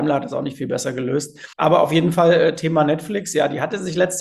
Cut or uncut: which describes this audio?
cut